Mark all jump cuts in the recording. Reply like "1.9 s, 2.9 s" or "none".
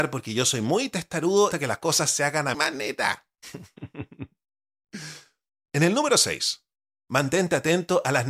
1.5 s, 2.5 s